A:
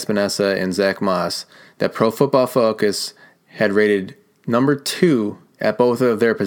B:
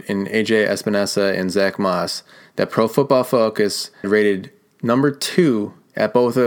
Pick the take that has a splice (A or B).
B